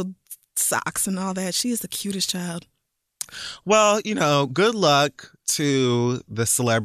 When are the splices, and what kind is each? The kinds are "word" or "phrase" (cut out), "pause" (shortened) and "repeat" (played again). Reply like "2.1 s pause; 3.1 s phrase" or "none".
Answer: none